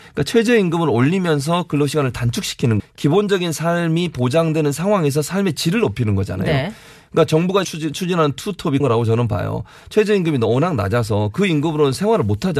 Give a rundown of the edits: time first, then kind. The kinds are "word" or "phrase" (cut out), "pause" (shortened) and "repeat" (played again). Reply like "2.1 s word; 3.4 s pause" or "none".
2.8 s word; 7.6 s word; 8.8 s word